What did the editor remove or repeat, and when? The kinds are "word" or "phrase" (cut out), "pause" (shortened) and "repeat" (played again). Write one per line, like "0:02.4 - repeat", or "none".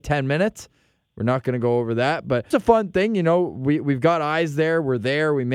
0:02.5 - word